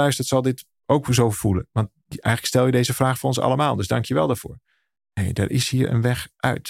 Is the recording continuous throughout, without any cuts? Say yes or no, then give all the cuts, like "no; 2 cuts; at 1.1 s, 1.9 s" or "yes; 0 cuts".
yes; 0 cuts